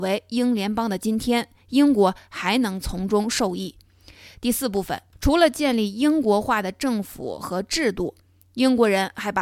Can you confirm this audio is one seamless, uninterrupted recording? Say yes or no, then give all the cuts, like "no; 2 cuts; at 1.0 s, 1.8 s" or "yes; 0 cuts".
no; 1 cut; at 5.1 s